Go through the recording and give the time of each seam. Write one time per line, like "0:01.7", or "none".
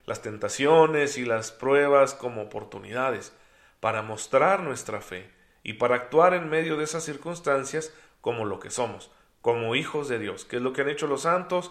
none